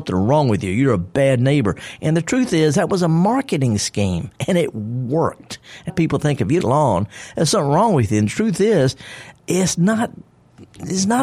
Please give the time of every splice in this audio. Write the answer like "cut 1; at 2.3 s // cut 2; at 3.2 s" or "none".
cut 1; at 4.4 s // cut 2; at 5.9 s // cut 3; at 6.6 s // cut 4; at 9.4 s